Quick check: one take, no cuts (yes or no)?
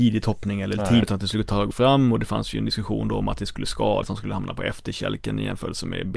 no